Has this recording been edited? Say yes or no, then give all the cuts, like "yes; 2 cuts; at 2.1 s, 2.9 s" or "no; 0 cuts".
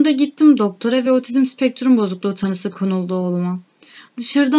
no; 0 cuts